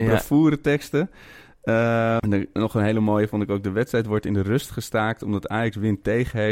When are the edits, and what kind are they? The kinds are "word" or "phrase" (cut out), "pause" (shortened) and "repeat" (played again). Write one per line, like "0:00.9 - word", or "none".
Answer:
0:02.2 - word